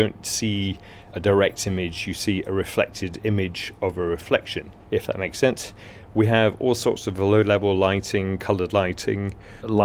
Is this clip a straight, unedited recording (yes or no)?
no